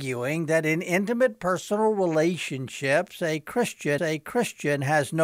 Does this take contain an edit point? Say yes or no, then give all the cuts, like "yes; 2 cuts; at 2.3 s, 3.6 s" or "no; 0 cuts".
yes; 1 cut; at 4.0 s